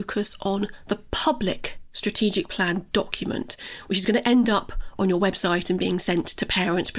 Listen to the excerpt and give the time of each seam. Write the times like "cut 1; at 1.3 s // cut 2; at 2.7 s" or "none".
none